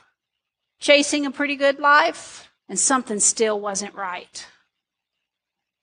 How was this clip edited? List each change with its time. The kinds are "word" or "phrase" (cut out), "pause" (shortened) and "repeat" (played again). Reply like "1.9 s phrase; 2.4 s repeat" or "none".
2.6 s pause